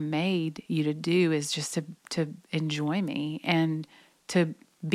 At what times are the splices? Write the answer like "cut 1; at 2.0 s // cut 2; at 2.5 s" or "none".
none